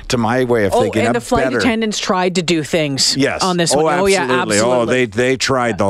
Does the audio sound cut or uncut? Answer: uncut